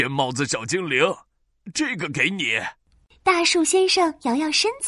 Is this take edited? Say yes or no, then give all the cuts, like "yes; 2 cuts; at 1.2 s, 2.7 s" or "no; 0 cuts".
no; 0 cuts